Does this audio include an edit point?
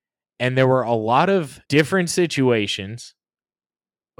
yes; 1 cut; at 1.6 s

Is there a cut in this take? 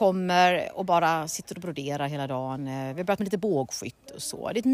no; 0 cuts

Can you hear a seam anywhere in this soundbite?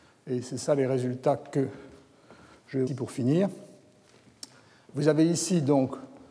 yes; 1 cut; at 2.9 s

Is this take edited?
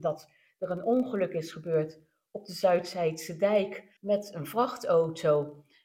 yes; 1 cut; at 4.0 s

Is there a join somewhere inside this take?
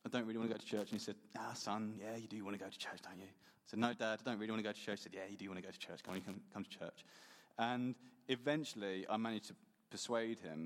no; 0 cuts

